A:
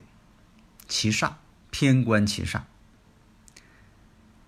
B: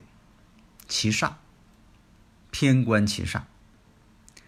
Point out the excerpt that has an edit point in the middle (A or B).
A